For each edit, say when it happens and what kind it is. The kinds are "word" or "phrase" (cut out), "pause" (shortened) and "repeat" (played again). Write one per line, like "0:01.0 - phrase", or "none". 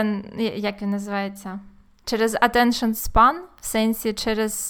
none